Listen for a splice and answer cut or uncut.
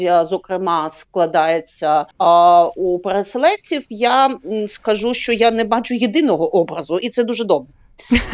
cut